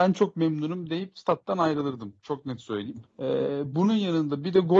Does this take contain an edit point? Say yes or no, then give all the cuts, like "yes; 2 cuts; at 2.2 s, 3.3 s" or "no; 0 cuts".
yes; 1 cut; at 3.1 s